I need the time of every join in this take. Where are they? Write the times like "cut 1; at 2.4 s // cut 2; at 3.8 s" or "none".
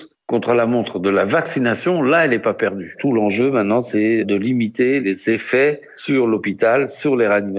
none